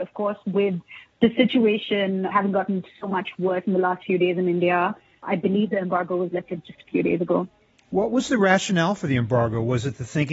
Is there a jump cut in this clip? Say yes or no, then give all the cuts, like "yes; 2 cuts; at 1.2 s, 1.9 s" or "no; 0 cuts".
no; 0 cuts